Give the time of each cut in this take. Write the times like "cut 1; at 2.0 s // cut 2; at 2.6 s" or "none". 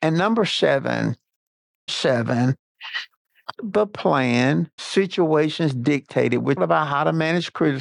cut 1; at 1.9 s // cut 2; at 3.5 s // cut 3; at 4.8 s // cut 4; at 6.6 s